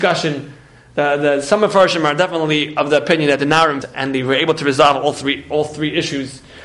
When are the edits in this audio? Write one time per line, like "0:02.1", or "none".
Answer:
0:03.8

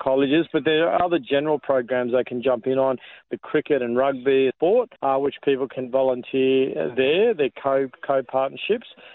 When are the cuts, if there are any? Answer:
0:03.3
0:04.5
0:05.0

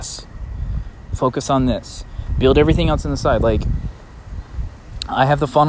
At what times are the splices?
none

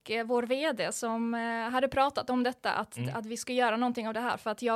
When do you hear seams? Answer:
none

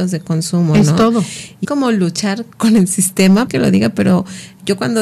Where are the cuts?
0:01.6
0:02.5
0:03.5

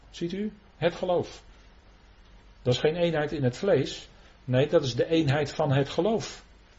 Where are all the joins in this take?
none

